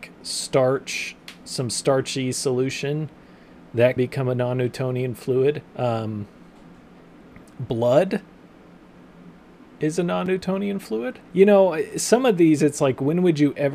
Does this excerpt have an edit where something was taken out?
yes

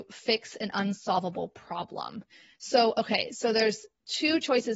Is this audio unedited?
yes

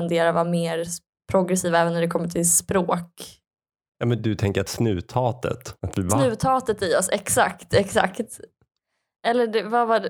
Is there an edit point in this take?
yes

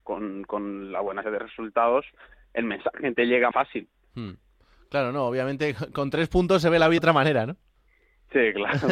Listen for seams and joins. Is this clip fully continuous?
no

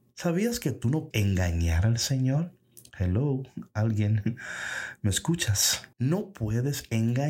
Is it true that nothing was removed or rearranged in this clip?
no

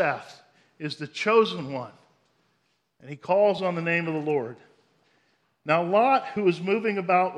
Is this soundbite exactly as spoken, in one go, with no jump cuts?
yes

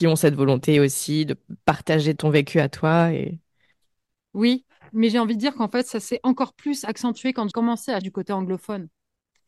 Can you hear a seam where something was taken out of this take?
yes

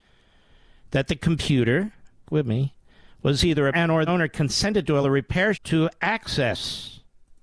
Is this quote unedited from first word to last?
no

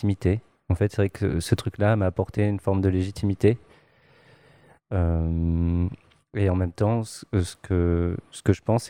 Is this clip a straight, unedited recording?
yes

